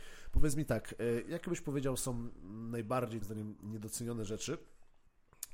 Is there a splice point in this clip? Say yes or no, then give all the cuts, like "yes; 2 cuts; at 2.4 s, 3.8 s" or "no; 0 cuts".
yes; 1 cut; at 3.2 s